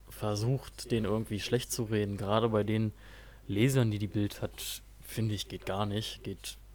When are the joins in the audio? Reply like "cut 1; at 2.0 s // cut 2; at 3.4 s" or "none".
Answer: none